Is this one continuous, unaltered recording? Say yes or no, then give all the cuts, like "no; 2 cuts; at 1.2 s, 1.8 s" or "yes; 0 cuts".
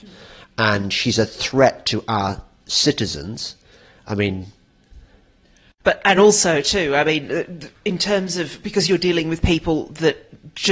yes; 0 cuts